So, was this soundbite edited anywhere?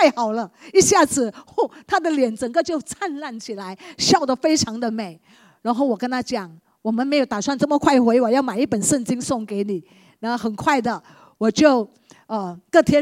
no; 0 cuts

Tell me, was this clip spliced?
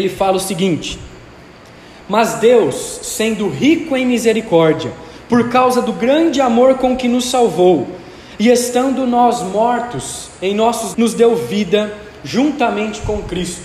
yes; 1 cut; at 10.9 s

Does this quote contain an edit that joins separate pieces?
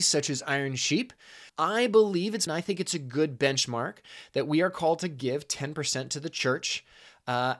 yes; 2 cuts; at 1.5 s, 2.5 s

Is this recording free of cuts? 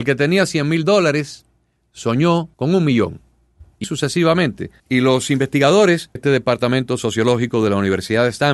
no; 4 cuts; at 2.5 s, 3.8 s, 4.8 s, 6.2 s

